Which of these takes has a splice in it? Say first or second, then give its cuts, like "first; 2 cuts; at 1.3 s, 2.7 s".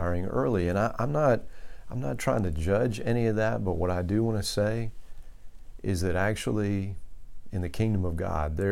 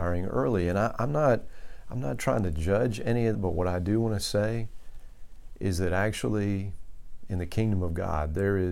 second; 1 cut; at 3.3 s